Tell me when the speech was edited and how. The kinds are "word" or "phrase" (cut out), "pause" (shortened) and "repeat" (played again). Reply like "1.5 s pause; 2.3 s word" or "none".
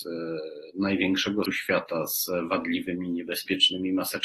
1.4 s word